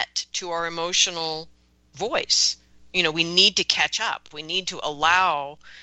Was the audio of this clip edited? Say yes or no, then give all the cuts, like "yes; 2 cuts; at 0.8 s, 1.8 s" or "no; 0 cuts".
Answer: no; 0 cuts